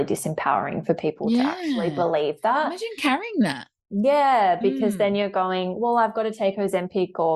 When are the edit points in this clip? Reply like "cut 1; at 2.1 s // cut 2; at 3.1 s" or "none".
none